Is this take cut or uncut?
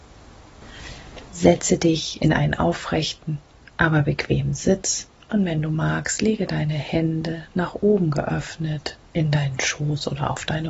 cut